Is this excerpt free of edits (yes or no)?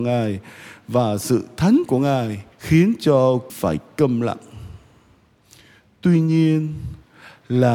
no